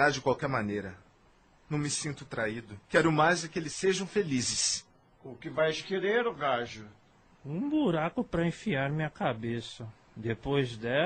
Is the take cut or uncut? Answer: cut